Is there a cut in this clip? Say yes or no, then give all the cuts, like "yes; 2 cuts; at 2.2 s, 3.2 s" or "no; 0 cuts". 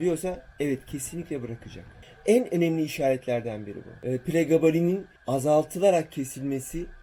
yes; 1 cut; at 5.2 s